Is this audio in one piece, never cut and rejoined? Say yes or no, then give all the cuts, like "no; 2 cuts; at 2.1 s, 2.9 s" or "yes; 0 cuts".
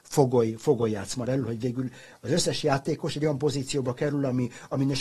no; 1 cut; at 1.2 s